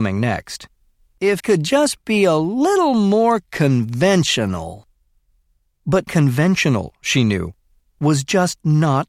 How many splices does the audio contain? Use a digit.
2